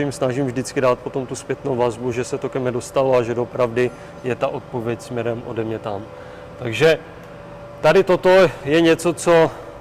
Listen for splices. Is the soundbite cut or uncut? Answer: uncut